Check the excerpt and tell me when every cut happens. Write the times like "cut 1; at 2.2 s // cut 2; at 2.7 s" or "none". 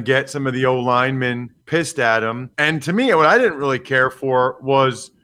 cut 1; at 1.6 s // cut 2; at 2.5 s